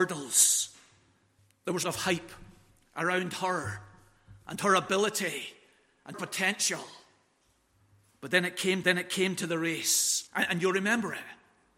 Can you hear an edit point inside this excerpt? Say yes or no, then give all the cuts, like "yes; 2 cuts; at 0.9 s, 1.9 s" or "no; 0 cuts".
yes; 5 cuts; at 1.4 s, 1.8 s, 6.1 s, 8.8 s, 10.3 s